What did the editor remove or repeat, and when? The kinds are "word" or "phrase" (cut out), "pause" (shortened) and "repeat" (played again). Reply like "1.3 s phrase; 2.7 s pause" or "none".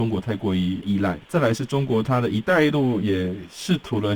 1.2 s pause